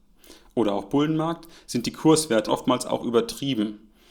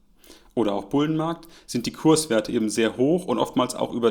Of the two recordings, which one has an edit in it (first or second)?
first